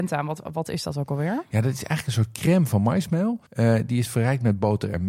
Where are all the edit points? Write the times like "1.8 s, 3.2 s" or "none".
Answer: 3.5 s